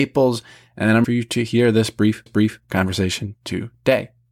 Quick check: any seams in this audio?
yes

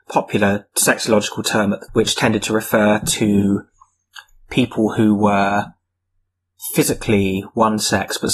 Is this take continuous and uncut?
no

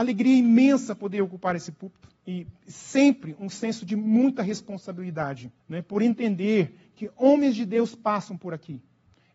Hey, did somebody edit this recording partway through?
yes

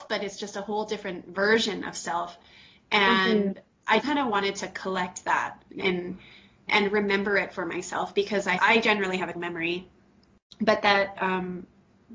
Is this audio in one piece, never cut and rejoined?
no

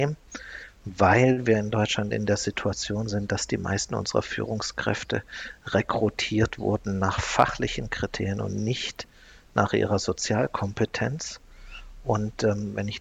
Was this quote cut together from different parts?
no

